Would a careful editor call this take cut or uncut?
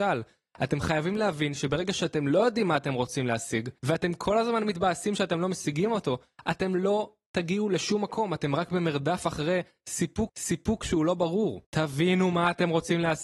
cut